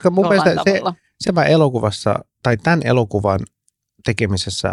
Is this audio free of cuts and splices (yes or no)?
no